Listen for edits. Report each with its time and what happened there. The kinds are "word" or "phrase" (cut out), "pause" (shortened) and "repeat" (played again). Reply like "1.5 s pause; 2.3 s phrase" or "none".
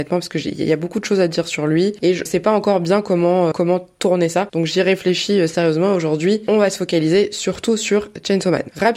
2.3 s word; 3.5 s word